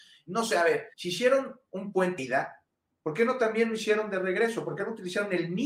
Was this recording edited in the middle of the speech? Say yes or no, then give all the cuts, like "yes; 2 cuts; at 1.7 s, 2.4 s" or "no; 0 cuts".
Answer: yes; 2 cuts; at 0.9 s, 2.2 s